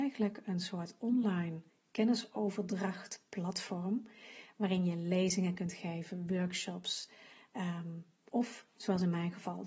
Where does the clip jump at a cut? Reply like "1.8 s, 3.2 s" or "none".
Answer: none